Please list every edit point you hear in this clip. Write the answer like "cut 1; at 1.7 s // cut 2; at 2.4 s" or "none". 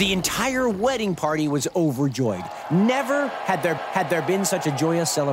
cut 1; at 3.8 s